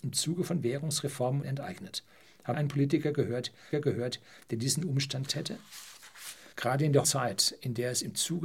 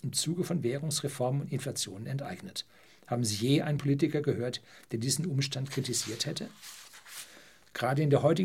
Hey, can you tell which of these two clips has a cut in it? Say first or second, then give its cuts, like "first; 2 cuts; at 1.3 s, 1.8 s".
first; 6 cuts; at 1.4 s, 2.5 s, 3.7 s, 5.3 s, 6.5 s, 7.0 s